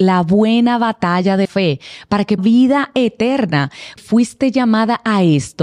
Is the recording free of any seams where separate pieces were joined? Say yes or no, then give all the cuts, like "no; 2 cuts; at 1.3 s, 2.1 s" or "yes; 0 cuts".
no; 3 cuts; at 1.4 s, 2.4 s, 4.0 s